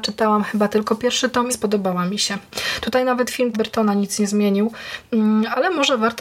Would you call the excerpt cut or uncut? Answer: cut